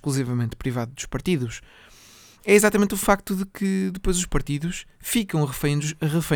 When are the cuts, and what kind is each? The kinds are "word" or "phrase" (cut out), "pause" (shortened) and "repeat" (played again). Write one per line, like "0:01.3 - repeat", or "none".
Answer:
none